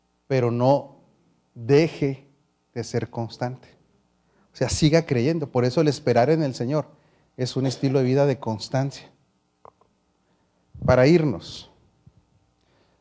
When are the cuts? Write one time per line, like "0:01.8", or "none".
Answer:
none

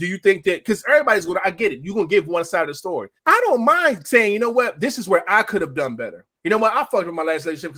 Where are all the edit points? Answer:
0:03.2
0:06.4

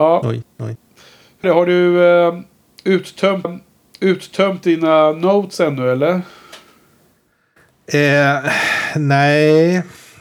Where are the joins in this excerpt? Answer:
0:01.4
0:03.4

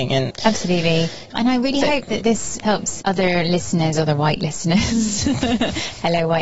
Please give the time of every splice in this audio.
none

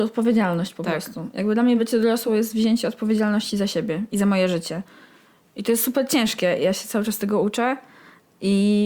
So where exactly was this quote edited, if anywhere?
none

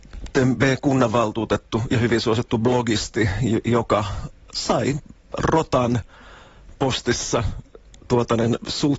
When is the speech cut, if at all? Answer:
none

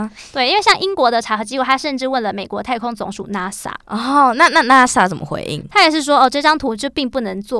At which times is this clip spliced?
0:03.8

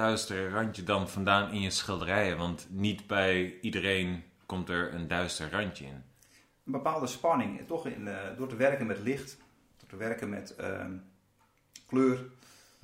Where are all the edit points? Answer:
none

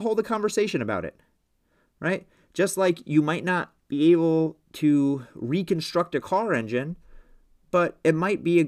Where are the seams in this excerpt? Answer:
none

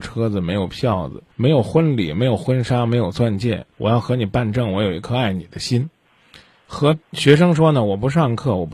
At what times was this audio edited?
0:01.3
0:03.7
0:07.0

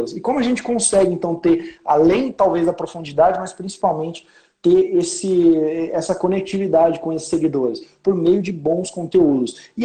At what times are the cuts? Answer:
none

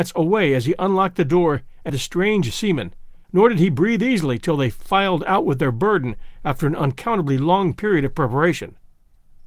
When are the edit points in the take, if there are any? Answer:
0:01.9
0:03.2

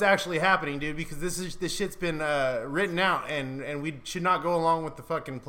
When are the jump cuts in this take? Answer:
none

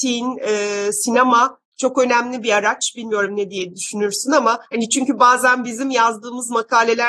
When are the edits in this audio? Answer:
0:04.7

